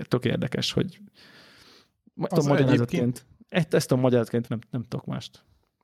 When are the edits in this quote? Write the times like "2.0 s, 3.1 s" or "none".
2.3 s, 4.5 s